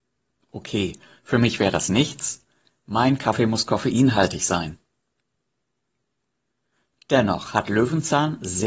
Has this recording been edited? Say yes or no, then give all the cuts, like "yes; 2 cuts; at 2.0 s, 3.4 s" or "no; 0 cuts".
no; 0 cuts